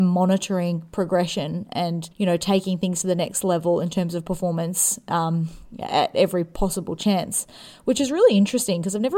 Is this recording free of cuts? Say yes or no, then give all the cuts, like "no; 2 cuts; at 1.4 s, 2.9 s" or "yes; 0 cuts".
no; 1 cut; at 2.1 s